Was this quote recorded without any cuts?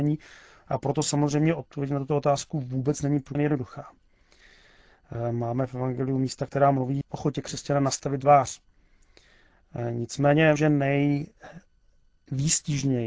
no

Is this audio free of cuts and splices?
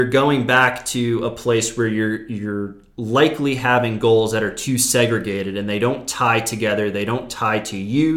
yes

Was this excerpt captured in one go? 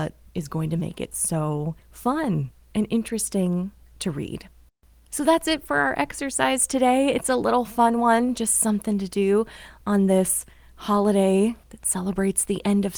no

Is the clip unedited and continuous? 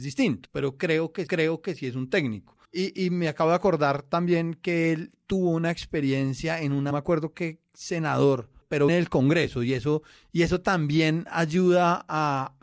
no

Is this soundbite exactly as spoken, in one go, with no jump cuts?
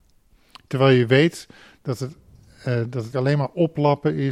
no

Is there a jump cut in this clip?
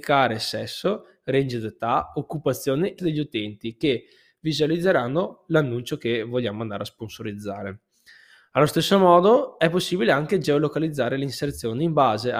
yes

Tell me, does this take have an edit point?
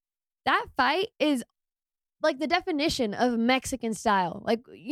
yes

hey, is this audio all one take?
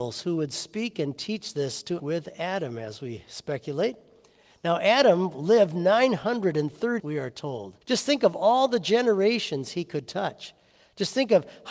no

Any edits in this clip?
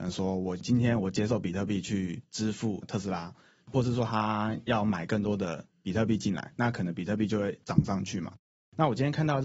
no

